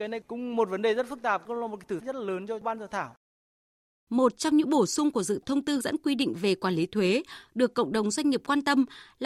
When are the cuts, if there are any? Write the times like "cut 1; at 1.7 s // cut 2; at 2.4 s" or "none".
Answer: cut 1; at 2.0 s // cut 2; at 5.4 s // cut 3; at 5.8 s